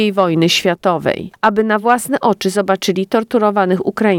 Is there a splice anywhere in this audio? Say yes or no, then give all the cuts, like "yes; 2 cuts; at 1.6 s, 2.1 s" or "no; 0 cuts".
no; 0 cuts